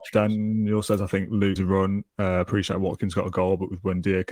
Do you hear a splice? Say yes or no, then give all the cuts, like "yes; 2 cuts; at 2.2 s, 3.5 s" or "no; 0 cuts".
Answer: yes; 1 cut; at 1.6 s